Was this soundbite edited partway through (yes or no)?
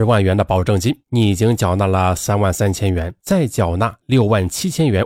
yes